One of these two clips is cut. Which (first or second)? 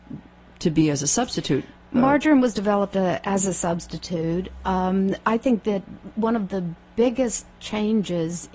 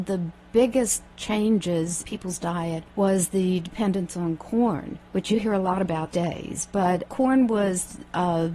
second